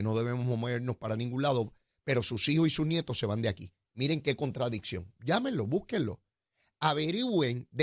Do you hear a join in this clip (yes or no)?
no